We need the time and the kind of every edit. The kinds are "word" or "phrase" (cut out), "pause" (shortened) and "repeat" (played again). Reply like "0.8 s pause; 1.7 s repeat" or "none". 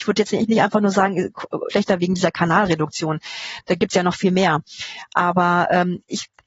1.7 s phrase